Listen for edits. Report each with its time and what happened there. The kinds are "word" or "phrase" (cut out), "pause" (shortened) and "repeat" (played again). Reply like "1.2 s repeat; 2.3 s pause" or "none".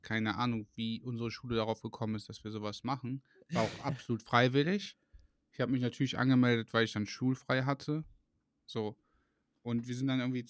none